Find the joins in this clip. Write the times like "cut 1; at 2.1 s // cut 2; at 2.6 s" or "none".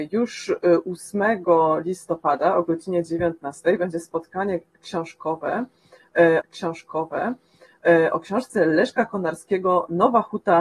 cut 1; at 6.4 s